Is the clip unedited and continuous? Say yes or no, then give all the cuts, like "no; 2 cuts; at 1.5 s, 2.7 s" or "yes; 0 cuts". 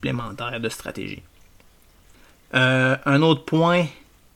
yes; 0 cuts